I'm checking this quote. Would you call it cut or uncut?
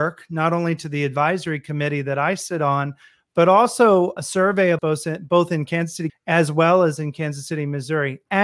cut